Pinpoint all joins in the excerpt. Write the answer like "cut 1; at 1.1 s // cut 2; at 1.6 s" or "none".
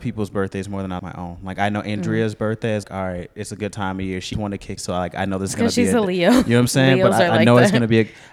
cut 1; at 1.0 s // cut 2; at 2.8 s // cut 3; at 4.3 s // cut 4; at 4.8 s